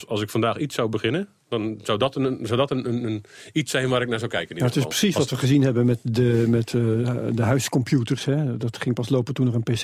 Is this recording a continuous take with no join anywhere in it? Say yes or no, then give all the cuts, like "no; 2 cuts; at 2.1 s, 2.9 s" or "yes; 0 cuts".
yes; 0 cuts